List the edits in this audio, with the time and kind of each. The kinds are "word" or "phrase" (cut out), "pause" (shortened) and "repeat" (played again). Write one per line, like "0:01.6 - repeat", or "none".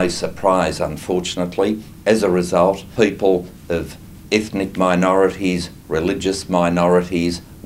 0:03.0 - word

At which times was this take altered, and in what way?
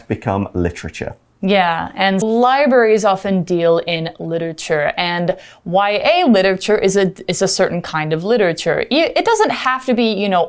0:02.2 - word

